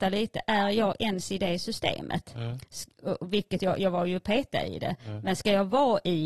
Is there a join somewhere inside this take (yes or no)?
no